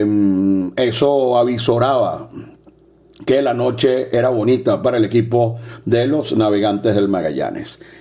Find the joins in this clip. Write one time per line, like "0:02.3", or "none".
none